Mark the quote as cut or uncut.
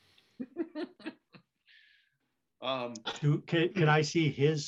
uncut